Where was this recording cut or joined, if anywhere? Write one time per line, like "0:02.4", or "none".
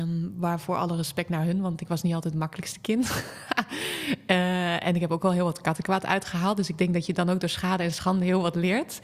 none